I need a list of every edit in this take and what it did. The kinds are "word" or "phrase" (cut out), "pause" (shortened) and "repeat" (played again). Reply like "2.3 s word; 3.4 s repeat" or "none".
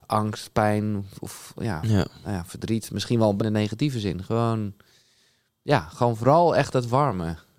3.4 s phrase